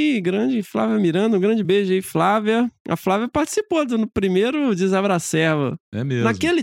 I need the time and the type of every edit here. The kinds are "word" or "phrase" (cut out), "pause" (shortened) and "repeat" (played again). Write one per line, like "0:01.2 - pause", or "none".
none